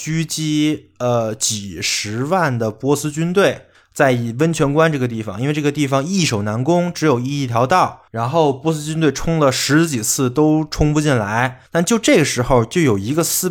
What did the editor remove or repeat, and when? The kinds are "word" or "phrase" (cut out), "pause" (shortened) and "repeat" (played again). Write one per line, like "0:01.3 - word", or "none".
0:03.7 - pause
0:08.1 - pause
0:11.7 - pause